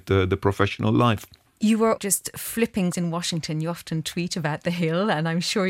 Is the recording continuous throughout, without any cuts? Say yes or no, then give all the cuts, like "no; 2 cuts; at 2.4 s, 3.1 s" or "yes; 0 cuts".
no; 2 cuts; at 2.0 s, 2.9 s